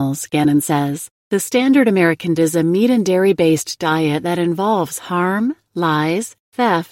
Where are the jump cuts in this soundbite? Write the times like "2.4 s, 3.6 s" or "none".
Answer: 1.2 s, 2.4 s